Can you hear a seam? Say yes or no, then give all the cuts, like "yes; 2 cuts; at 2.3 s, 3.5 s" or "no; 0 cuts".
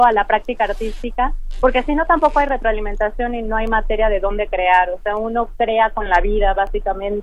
no; 0 cuts